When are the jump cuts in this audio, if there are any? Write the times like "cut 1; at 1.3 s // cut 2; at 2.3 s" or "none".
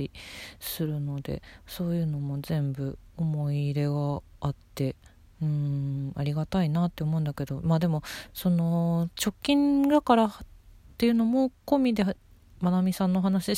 none